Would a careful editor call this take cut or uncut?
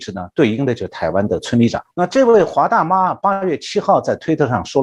cut